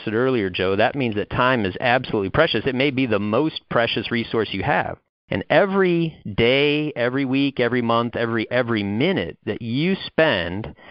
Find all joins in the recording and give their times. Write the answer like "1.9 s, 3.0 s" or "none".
5.1 s, 8.5 s